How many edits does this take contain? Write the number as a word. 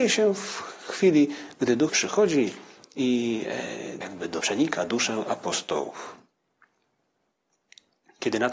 three